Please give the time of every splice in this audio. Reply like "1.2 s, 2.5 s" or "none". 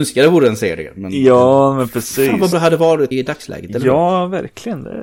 2.5 s, 3.1 s

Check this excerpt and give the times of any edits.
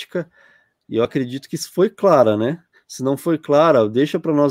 none

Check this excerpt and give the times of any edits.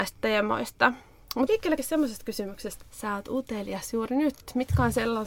1.5 s, 1.8 s, 2.8 s

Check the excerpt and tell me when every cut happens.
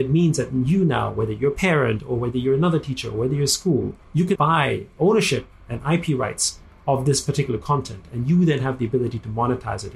4.0 s, 4.3 s

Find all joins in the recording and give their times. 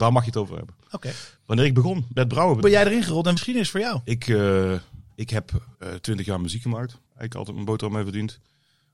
1.4 s, 2.1 s, 2.6 s, 3.4 s, 5.7 s, 7.1 s

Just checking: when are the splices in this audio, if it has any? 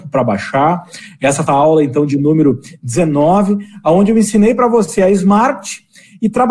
1.5 s

